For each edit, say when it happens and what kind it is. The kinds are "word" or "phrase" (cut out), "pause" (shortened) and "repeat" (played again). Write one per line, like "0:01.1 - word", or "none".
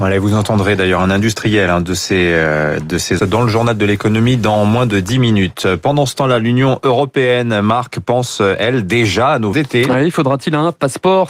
0:03.2 - word
0:09.5 - word